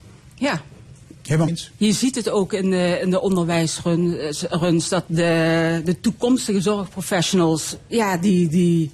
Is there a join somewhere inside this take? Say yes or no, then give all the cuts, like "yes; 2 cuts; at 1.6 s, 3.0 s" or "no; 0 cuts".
yes; 2 cuts; at 1.5 s, 5.1 s